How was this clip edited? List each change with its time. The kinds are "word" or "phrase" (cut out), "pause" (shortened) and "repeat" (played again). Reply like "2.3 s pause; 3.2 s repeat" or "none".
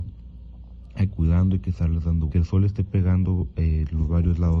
1.1 s phrase; 2.3 s phrase

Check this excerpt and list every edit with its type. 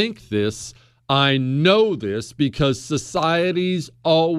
none

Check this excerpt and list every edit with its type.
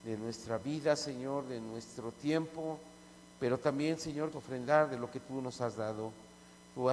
4.3 s word

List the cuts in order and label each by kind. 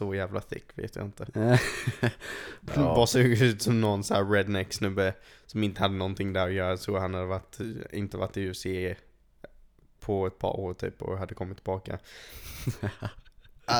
none

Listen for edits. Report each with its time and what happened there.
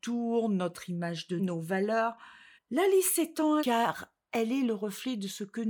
1.4 s word; 2.5 s pause; 3.6 s word

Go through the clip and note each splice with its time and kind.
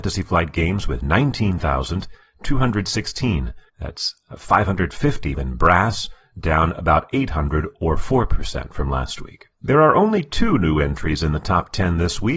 3.7 s pause; 5.3 s word; 9.5 s pause

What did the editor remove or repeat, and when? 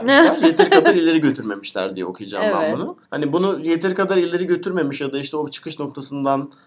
3.0 s pause

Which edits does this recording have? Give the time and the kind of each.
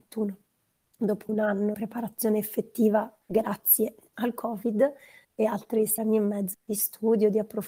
1.3 s word; 1.7 s word; 3.2 s pause; 5.2 s word; 6.0 s word; 6.5 s word

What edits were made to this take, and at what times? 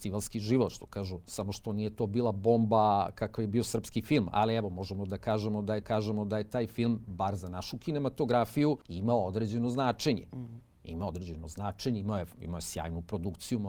5.8 s repeat; 8.8 s pause

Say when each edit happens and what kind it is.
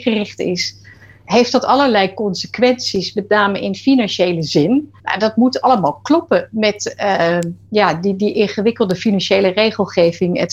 5.0 s pause

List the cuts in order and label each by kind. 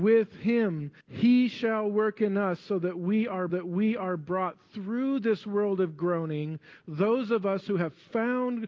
1.0 s pause; 3.5 s repeat

